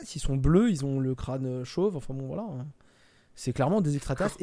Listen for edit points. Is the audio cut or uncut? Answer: uncut